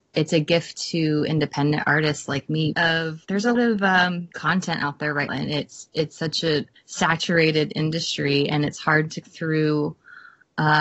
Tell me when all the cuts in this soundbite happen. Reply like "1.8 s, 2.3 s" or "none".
2.7 s, 3.2 s, 3.6 s, 4.3 s, 5.3 s, 6.8 s, 9.2 s